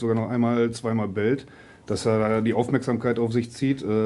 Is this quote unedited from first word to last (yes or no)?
yes